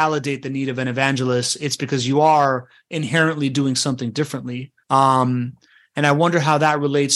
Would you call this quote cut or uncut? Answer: cut